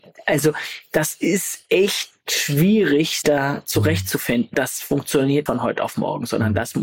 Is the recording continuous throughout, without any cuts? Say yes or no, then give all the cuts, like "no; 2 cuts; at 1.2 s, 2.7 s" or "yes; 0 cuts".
no; 3 cuts; at 3.2 s, 4.5 s, 5.5 s